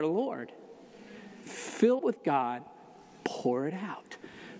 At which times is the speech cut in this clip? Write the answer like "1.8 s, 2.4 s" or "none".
2.0 s